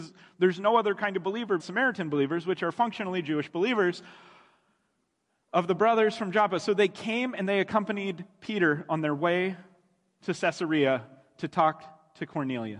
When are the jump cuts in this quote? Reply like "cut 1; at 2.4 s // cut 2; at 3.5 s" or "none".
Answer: cut 1; at 1.6 s